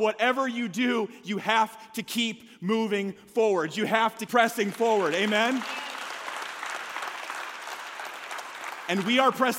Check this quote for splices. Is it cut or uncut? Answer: cut